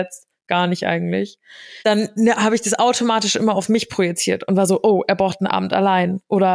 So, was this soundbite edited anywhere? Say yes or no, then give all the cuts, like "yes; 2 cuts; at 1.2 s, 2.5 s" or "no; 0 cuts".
yes; 1 cut; at 1.8 s